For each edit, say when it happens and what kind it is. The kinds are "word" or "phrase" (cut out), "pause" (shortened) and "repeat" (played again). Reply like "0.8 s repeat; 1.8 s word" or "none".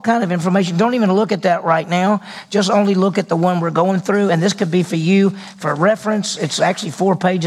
none